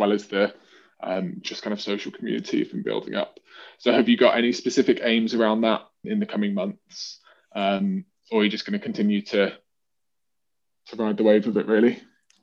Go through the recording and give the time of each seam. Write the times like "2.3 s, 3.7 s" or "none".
6.0 s